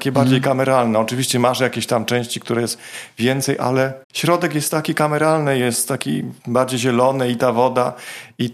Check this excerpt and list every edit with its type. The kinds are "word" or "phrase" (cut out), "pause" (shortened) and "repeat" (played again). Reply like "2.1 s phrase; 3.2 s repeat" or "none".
4.0 s pause; 6.4 s pause